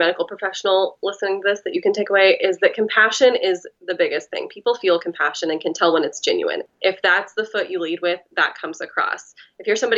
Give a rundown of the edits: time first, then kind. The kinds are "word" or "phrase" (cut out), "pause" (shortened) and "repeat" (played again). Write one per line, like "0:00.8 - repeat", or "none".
none